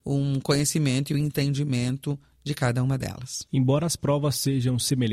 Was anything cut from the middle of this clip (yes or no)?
no